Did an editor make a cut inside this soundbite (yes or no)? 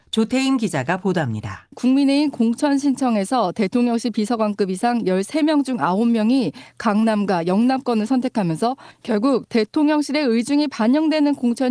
yes